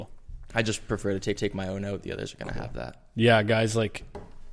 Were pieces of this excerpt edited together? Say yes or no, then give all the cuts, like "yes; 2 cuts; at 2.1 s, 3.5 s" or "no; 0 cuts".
yes; 1 cut; at 1.4 s